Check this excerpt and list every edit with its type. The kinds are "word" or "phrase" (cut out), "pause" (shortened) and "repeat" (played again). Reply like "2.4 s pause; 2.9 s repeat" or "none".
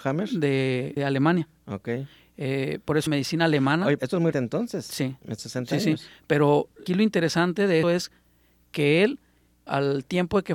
1.0 s word; 3.1 s word; 4.0 s word; 4.3 s word; 5.4 s word; 6.9 s word; 7.8 s word; 9.7 s word